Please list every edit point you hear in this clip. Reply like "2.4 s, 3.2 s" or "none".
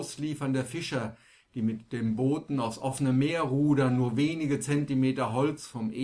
none